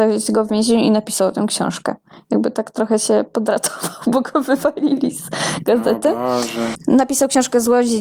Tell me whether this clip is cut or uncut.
uncut